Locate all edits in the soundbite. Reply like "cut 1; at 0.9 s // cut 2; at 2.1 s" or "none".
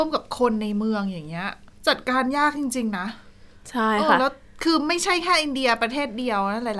cut 1; at 1.8 s

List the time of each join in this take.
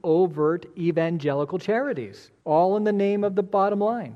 cut 1; at 2.4 s

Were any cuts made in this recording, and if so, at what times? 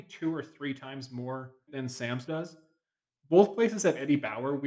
cut 1; at 1.7 s // cut 2; at 2.3 s

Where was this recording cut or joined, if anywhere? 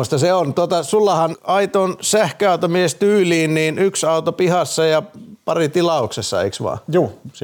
cut 1; at 1.3 s

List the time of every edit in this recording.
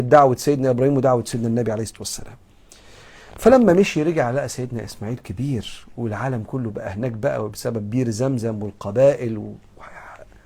none

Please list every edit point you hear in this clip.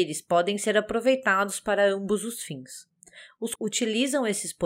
cut 1; at 3.6 s

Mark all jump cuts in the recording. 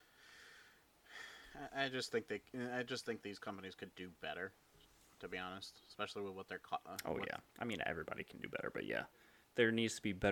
none

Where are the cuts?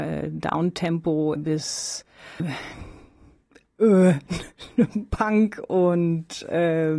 cut 1; at 1.4 s // cut 2; at 2.4 s

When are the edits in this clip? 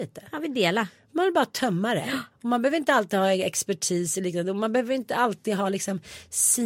cut 1; at 2.3 s

